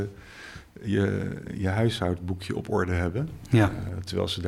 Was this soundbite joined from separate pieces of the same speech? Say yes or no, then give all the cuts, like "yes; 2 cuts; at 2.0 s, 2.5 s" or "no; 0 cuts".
no; 0 cuts